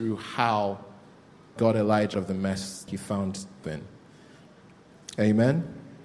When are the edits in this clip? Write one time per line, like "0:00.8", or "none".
0:01.6
0:02.1
0:02.9
0:03.6